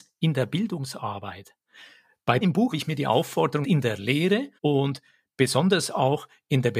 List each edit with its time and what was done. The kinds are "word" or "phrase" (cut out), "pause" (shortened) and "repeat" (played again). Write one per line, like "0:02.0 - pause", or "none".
0:02.4 - word
0:02.7 - word
0:03.6 - word
0:04.6 - pause